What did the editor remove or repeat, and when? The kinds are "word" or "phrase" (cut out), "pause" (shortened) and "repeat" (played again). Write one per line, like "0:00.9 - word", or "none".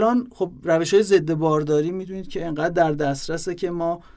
none